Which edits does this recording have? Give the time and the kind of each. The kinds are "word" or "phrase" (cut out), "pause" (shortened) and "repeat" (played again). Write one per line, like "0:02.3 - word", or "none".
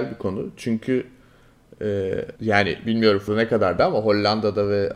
0:02.4 - pause
0:03.3 - word